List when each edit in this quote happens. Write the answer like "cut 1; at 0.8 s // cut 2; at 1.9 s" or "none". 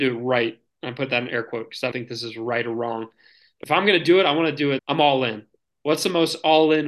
cut 1; at 1.9 s // cut 2; at 3.6 s // cut 3; at 4.8 s